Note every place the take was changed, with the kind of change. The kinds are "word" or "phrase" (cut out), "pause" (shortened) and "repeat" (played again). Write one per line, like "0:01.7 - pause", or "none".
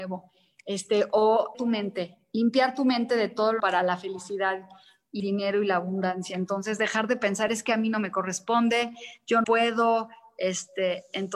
0:01.5 - word
0:03.6 - word
0:05.2 - word
0:09.4 - word